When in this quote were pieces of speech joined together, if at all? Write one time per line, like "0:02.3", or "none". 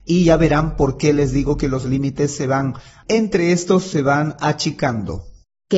none